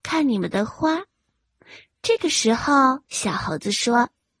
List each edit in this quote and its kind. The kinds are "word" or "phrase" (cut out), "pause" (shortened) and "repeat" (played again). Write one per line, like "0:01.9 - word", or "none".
0:03.1 - pause